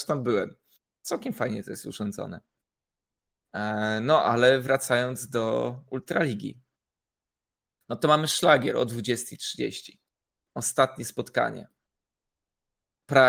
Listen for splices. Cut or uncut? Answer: uncut